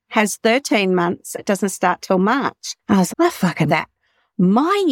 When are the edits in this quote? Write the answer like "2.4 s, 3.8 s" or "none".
1.4 s, 2.8 s, 3.1 s, 3.7 s